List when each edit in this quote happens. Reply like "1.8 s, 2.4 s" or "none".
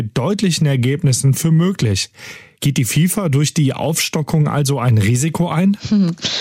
none